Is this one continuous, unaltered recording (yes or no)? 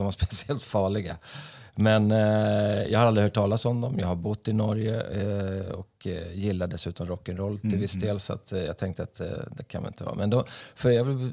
yes